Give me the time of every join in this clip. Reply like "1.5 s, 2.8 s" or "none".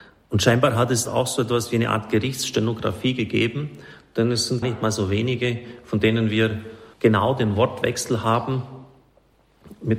1.1 s, 4.6 s, 6.9 s